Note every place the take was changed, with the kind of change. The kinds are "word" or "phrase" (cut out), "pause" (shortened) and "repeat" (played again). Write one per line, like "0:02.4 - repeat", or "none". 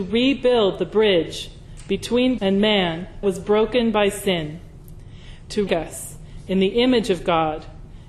0:02.4 - word
0:03.2 - word
0:05.7 - word